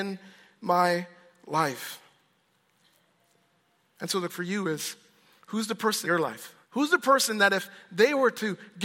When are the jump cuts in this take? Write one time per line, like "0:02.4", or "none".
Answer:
0:04.3
0:06.0
0:06.6